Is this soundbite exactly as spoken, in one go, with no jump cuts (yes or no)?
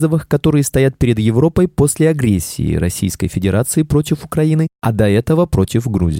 yes